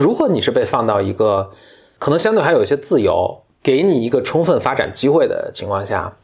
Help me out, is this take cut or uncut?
uncut